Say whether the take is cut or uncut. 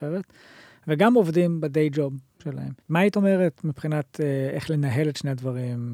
cut